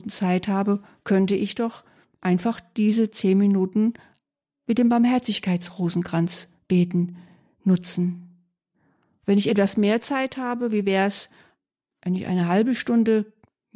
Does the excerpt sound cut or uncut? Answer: uncut